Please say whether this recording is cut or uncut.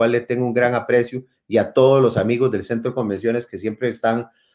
uncut